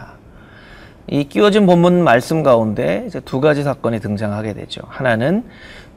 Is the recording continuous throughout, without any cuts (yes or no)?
yes